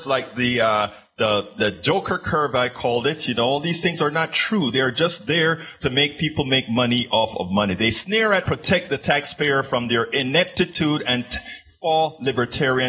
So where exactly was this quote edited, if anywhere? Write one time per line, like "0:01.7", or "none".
0:08.4